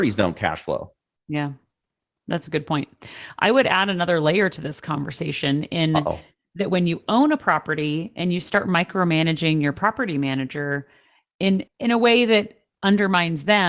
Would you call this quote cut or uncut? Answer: uncut